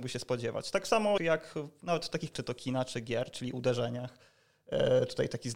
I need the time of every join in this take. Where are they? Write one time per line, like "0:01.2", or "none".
0:01.2
0:02.3